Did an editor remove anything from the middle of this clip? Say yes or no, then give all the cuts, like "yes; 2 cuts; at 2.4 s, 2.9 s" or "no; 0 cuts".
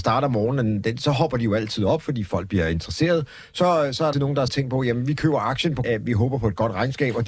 yes; 3 cuts; at 4.1 s, 4.5 s, 5.8 s